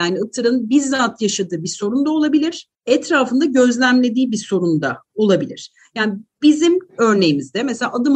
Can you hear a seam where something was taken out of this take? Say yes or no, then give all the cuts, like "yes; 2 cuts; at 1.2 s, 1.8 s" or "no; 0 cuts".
yes; 1 cut; at 2.7 s